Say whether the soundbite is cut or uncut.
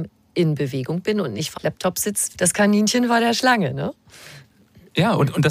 cut